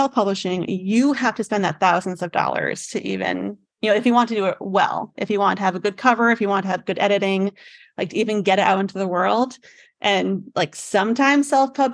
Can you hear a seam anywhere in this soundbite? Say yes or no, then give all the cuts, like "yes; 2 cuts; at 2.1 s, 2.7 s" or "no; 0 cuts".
no; 0 cuts